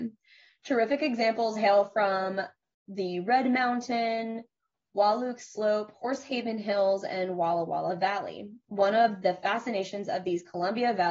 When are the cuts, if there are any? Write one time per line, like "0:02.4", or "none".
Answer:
none